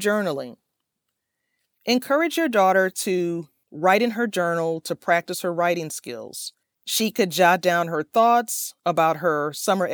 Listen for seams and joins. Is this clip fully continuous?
no; 1 cut; at 6.6 s

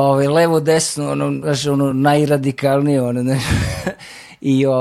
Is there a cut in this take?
no; 0 cuts

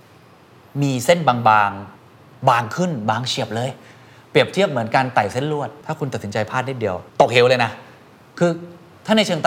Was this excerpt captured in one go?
no; 2 cuts; at 2.0 s, 7.1 s

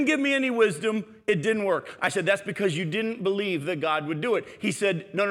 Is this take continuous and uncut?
yes; 0 cuts

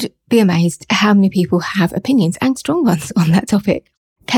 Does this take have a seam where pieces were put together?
yes; 1 cut; at 2.5 s

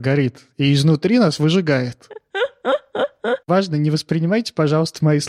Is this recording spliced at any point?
no; 0 cuts

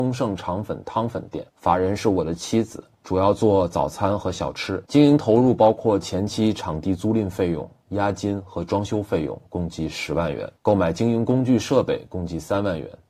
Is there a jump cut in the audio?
yes; 4 cuts; at 1.5 s, 2.9 s, 4.9 s, 10.6 s

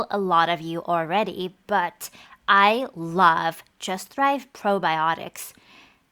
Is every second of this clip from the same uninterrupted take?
yes; 0 cuts

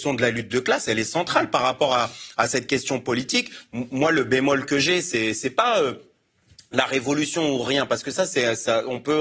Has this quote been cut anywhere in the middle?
no; 0 cuts

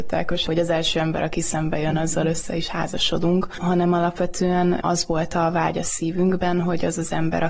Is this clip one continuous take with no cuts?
yes; 0 cuts

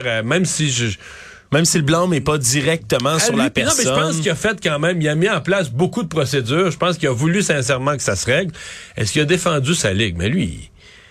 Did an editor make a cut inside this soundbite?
no; 0 cuts

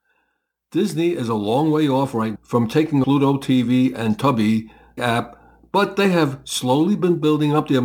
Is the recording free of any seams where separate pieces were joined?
no; 3 cuts; at 2.4 s, 3.0 s, 5.0 s

